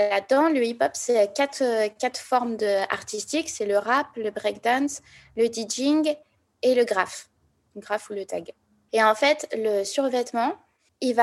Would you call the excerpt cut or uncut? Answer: uncut